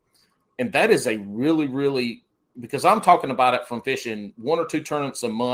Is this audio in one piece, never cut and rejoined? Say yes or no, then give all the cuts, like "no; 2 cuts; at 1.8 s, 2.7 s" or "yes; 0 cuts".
yes; 0 cuts